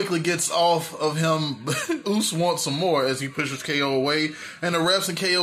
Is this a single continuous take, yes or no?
no